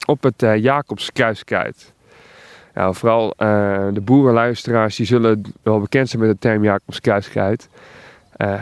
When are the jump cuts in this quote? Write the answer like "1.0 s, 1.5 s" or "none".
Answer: none

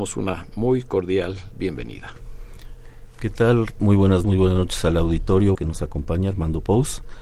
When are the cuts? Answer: 4.2 s, 5.5 s

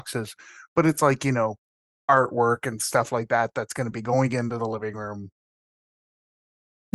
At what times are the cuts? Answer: none

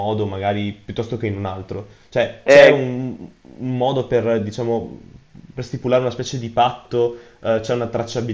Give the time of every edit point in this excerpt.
none

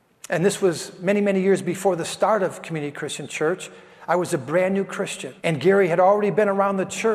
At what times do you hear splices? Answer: 5.4 s

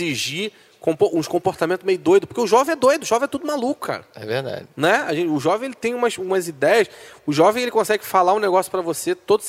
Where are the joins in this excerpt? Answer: none

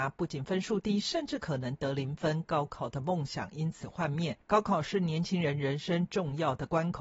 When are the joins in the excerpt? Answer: 4.4 s

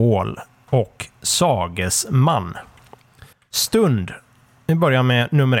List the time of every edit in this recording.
3.3 s

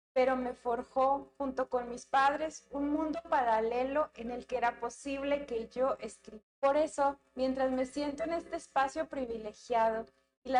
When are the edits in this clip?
6.5 s

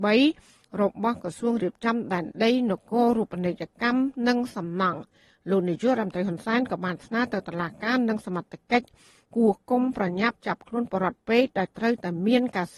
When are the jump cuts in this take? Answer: none

